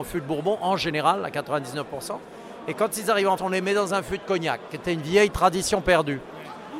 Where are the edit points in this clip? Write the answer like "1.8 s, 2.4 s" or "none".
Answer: 3.4 s